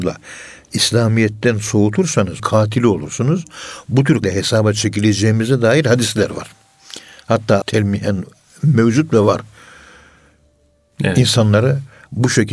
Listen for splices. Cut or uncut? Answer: cut